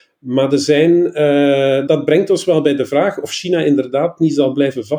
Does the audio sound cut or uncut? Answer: cut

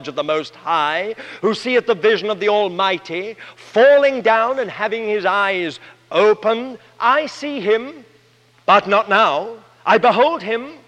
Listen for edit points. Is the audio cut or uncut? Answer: uncut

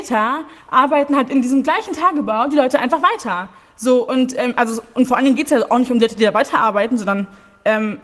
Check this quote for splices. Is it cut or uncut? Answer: uncut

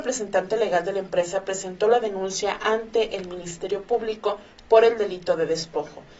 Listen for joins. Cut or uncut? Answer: uncut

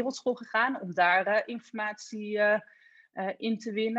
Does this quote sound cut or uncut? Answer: uncut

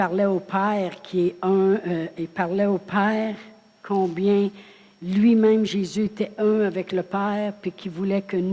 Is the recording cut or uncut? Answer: uncut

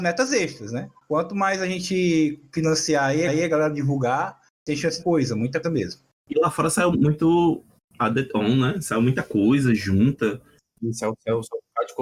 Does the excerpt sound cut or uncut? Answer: cut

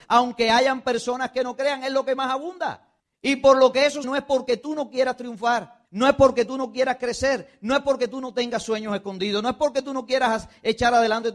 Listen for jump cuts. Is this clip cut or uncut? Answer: cut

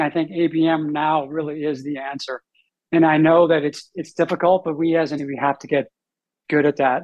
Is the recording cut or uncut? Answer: cut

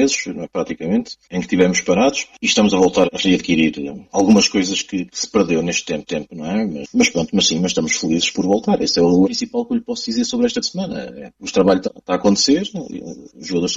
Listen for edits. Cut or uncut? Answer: cut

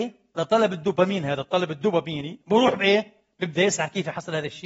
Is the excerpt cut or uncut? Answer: uncut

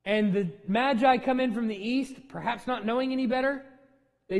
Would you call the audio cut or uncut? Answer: uncut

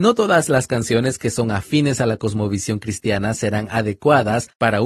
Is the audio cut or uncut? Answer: uncut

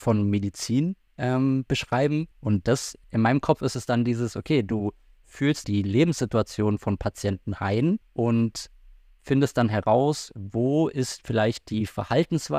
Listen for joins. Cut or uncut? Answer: cut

